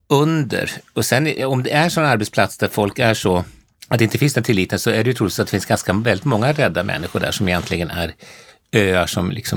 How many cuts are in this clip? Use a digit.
0